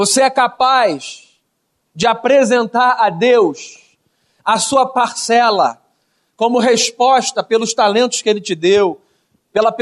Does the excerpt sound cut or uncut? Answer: uncut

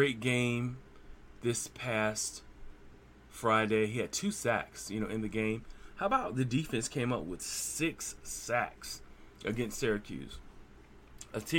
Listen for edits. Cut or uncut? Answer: uncut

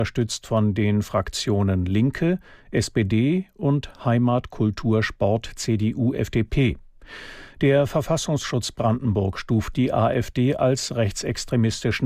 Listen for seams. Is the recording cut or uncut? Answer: uncut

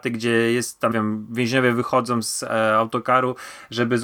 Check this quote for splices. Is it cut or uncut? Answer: cut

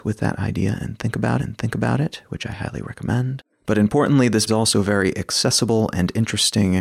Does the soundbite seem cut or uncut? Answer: cut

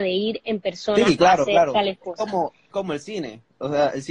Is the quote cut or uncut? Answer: cut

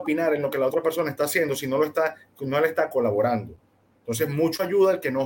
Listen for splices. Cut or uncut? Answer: uncut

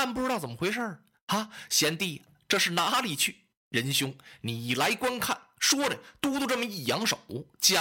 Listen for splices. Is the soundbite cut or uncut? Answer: uncut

